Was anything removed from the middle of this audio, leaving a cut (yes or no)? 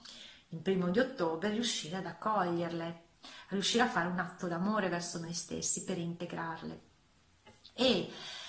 no